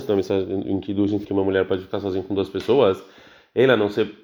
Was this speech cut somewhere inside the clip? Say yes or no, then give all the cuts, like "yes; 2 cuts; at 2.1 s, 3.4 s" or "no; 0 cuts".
yes; 1 cut; at 1.2 s